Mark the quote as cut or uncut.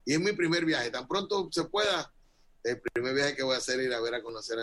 uncut